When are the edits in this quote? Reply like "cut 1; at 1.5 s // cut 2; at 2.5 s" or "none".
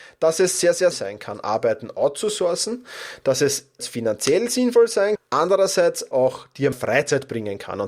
cut 1; at 0.9 s // cut 2; at 3.8 s // cut 3; at 5.2 s // cut 4; at 6.1 s // cut 5; at 6.7 s